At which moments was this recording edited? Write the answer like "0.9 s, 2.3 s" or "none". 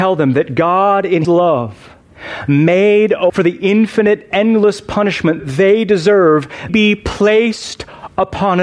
1.2 s, 3.3 s, 5.4 s, 6.7 s